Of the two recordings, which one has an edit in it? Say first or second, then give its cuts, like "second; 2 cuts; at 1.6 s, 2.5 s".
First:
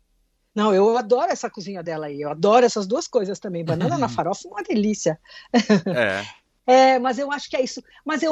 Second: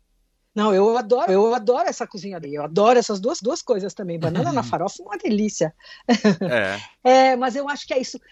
second; 4 cuts; at 1.3 s, 2.4 s, 3.4 s, 7.0 s